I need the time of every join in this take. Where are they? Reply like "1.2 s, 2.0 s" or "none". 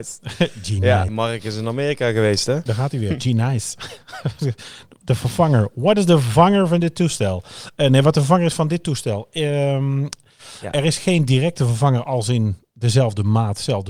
1.1 s, 2.7 s